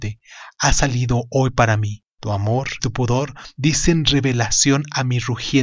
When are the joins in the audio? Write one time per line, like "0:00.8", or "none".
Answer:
0:02.1
0:02.8